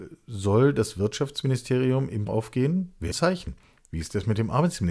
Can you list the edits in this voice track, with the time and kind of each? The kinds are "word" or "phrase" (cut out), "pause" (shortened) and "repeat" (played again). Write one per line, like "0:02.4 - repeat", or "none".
0:02.3 - word
0:03.1 - phrase